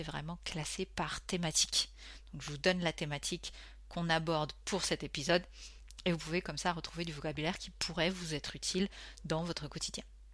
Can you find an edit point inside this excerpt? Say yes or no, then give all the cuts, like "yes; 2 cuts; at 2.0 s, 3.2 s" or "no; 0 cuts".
no; 0 cuts